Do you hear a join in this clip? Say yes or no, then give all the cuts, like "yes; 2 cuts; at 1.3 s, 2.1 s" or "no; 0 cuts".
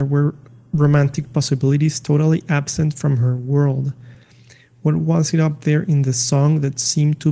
no; 0 cuts